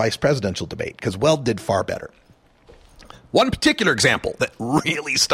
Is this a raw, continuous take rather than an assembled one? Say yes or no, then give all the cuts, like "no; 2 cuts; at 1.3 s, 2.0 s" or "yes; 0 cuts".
yes; 0 cuts